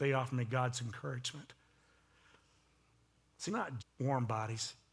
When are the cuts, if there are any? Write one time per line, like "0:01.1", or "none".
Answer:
0:03.5
0:03.8